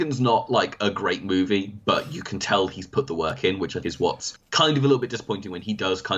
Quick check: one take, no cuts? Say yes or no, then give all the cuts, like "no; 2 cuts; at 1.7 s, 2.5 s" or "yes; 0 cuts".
no; 1 cut; at 3.8 s